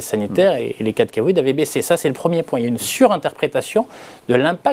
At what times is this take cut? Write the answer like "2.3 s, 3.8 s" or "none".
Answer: none